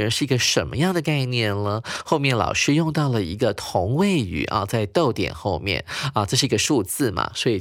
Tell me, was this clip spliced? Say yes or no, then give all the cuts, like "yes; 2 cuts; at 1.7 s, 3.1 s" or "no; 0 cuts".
no; 0 cuts